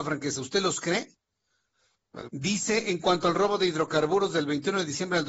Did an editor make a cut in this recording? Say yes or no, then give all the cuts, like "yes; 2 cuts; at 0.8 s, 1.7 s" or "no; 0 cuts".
yes; 1 cut; at 2.3 s